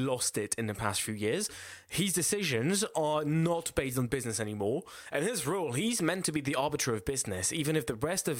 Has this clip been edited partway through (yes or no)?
no